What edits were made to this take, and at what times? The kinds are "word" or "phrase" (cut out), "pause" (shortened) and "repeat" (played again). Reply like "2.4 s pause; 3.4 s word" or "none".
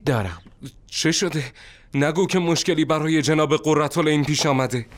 none